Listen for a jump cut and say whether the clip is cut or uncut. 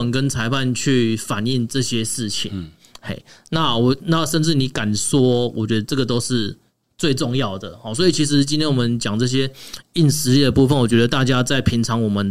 uncut